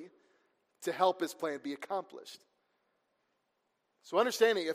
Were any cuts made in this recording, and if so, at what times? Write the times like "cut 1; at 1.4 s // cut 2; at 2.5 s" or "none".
none

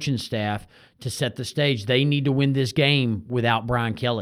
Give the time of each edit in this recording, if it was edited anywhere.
none

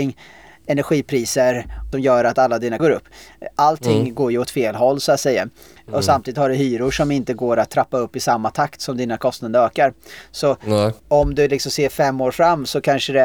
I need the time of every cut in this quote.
cut 1; at 1.9 s // cut 2; at 2.8 s // cut 3; at 11.0 s

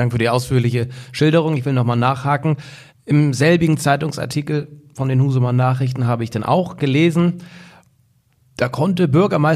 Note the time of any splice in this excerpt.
cut 1; at 2.9 s

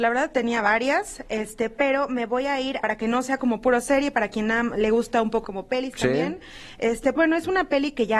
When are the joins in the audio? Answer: cut 1; at 2.8 s // cut 2; at 5.4 s // cut 3; at 7.2 s

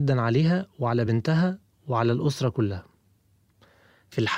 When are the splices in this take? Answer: none

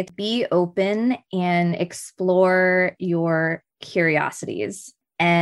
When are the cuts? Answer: none

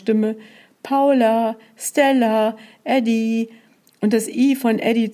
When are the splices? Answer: none

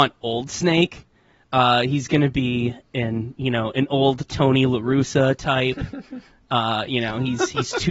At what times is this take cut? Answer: none

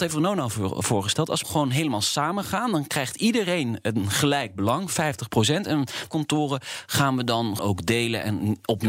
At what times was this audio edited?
cut 1; at 1.4 s // cut 2; at 6.1 s // cut 3; at 7.6 s

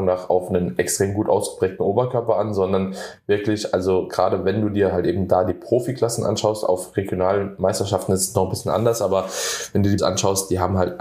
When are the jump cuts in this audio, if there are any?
cut 1; at 10.0 s

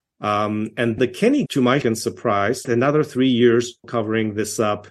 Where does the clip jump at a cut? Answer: cut 1; at 1.0 s // cut 2; at 1.5 s // cut 3; at 1.8 s // cut 4; at 2.6 s // cut 5; at 3.8 s

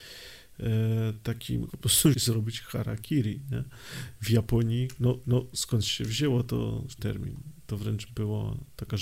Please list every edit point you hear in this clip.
cut 1; at 1.7 s // cut 2; at 2.1 s // cut 3; at 5.2 s // cut 4; at 7.0 s

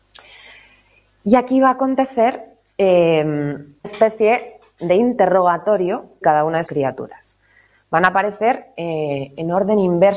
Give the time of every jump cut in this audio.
cut 1; at 3.8 s // cut 2; at 6.2 s // cut 3; at 6.7 s

